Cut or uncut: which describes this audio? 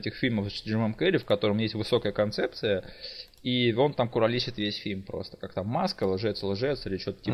uncut